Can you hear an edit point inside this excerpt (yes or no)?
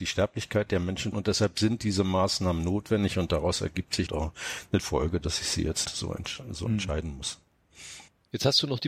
yes